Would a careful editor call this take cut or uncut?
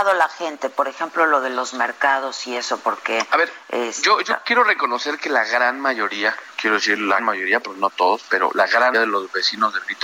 cut